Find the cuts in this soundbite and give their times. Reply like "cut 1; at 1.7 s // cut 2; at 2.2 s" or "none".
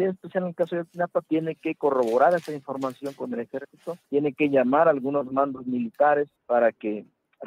cut 1; at 4.0 s // cut 2; at 6.3 s